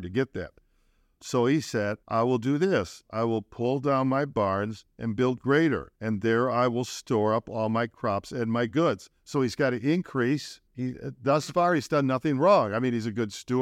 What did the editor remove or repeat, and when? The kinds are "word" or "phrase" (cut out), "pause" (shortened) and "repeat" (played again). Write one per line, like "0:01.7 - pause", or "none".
0:02.0 - pause
0:05.9 - pause
0:10.7 - pause

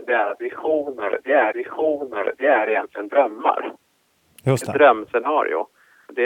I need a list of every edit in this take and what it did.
0:01.5 - repeat

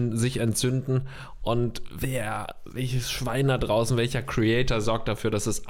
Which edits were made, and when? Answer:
none

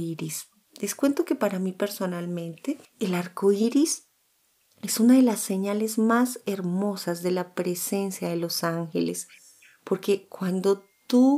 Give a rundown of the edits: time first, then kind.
none

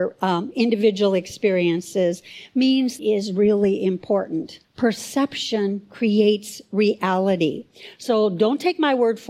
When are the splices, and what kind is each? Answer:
0:03.0 - phrase
0:04.6 - pause

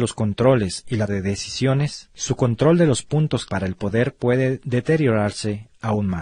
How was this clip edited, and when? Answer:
0:01.1 - word
0:03.5 - word

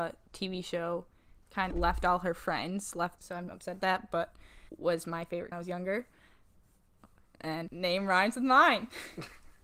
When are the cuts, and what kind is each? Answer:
0:01.7 - word
0:03.2 - word
0:03.8 - word
0:04.7 - word
0:05.5 - phrase
0:07.7 - word

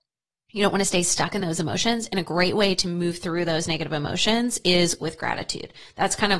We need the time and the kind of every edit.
none

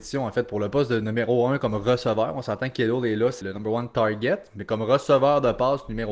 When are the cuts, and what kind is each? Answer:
0:03.4 - word

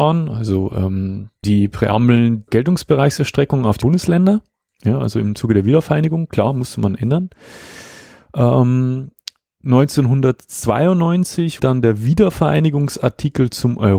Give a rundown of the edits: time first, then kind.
0:01.4 - word
0:02.5 - word
0:03.8 - word
0:11.6 - word

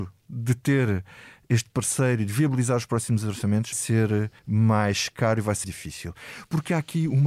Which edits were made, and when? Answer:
0:03.7 - word
0:04.4 - pause
0:05.6 - word

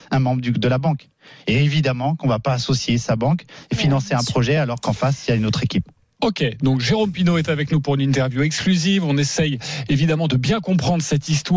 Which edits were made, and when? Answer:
none

